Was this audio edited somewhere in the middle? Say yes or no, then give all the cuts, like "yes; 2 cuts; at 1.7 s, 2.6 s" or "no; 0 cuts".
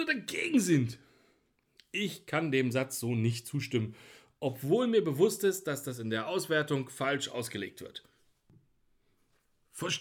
no; 0 cuts